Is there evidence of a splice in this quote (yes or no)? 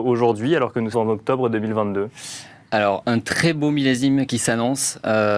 yes